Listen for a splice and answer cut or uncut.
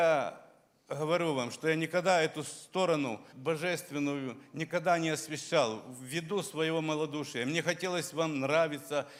cut